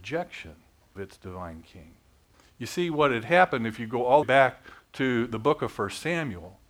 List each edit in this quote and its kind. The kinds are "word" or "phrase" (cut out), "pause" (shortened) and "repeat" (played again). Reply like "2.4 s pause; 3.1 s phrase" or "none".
1.0 s word; 2.3 s pause; 4.2 s phrase